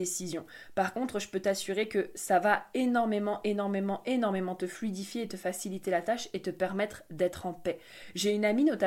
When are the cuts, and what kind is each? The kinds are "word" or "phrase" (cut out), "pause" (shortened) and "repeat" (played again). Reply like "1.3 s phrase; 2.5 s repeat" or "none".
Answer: none